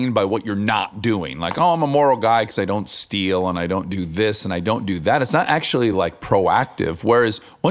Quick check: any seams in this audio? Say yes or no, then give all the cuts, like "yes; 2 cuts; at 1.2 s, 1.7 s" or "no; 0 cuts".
no; 0 cuts